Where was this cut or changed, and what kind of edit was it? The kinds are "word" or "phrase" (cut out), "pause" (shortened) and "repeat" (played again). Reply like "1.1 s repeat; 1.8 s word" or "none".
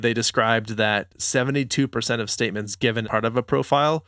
3.0 s word